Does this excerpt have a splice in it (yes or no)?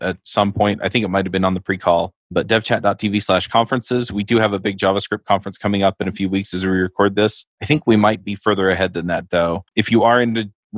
yes